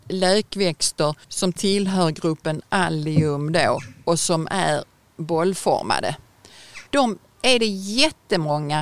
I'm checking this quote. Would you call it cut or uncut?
cut